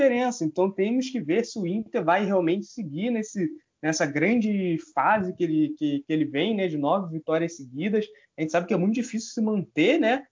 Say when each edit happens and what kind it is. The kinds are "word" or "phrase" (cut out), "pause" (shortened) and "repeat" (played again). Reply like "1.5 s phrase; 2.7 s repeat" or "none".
none